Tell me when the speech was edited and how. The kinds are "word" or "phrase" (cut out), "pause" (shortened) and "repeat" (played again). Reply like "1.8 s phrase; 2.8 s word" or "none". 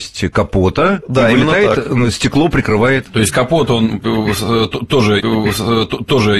5.2 s repeat